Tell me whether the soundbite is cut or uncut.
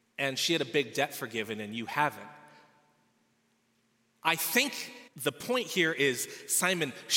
cut